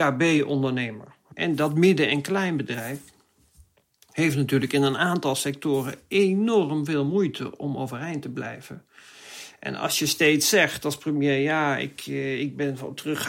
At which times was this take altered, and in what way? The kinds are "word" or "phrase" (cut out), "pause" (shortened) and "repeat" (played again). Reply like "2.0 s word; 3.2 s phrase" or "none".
none